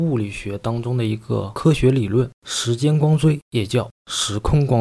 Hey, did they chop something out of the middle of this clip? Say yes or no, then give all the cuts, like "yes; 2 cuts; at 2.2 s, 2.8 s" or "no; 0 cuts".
yes; 1 cut; at 2.4 s